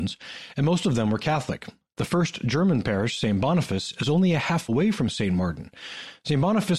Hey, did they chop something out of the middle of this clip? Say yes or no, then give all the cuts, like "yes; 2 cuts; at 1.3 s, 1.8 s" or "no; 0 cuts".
yes; 1 cut; at 4.7 s